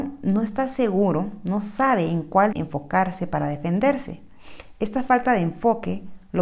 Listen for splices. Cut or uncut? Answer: cut